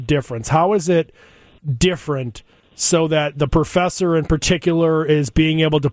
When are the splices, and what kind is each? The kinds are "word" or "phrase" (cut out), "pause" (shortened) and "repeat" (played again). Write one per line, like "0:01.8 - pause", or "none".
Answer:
none